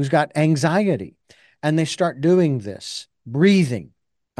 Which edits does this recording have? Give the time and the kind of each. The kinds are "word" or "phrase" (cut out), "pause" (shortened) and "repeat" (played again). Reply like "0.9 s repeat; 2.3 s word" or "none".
none